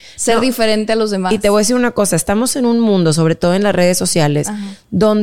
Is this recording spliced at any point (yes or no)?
no